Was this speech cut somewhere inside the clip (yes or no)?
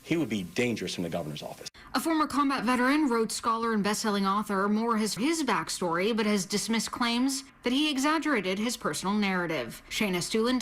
yes